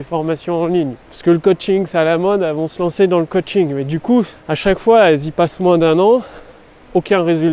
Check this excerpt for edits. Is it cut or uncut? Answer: cut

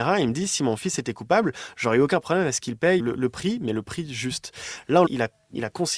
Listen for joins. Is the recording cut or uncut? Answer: cut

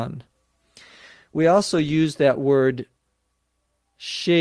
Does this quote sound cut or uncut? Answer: uncut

